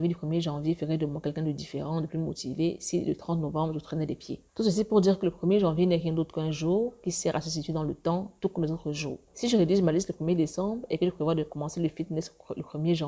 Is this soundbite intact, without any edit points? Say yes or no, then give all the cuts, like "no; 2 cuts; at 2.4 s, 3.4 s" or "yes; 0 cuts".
no; 2 cuts; at 4.5 s, 9.3 s